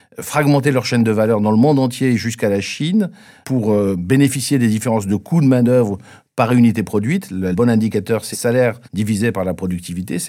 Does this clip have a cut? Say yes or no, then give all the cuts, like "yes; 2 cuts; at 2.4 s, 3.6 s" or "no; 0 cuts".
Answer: yes; 4 cuts; at 3.4 s, 7.5 s, 8.3 s, 8.8 s